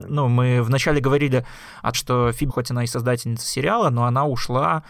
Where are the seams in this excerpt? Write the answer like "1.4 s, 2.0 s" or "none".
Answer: 1.9 s, 2.5 s